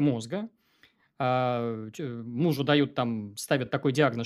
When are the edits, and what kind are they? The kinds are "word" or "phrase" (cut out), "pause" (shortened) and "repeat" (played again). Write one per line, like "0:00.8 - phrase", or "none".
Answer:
none